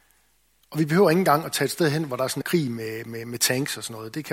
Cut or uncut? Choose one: cut